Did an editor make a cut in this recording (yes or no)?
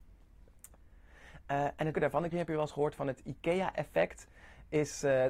yes